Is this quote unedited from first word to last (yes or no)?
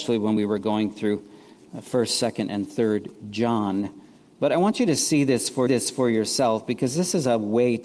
no